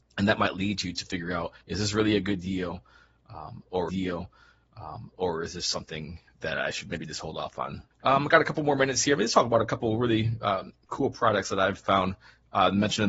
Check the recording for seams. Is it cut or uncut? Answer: cut